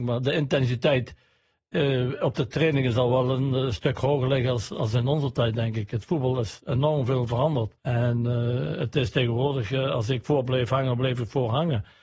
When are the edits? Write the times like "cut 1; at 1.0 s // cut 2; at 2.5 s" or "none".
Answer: cut 1; at 7.8 s